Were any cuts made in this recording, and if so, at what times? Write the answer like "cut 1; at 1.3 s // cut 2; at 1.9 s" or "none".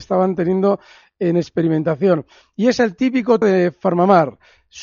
cut 1; at 3.4 s